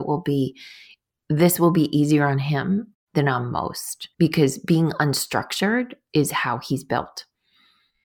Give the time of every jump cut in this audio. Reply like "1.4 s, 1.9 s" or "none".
3.0 s, 4.1 s, 6.1 s